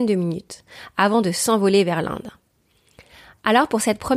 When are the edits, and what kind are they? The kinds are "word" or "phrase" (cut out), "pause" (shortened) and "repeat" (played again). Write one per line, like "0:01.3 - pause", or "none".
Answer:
none